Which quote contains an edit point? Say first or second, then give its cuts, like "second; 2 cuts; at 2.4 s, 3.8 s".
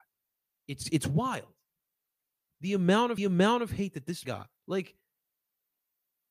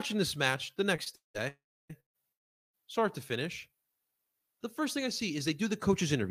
first; 3 cuts; at 3.2 s, 4.2 s, 4.6 s